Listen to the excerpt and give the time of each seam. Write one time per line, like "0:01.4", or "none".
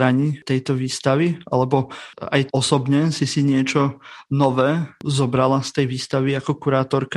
0:02.5